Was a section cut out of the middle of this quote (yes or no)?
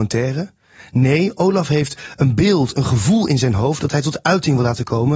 no